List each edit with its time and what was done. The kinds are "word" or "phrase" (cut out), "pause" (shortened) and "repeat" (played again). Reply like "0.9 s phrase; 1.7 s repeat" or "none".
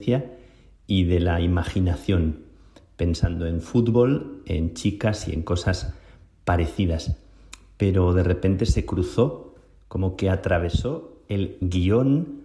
none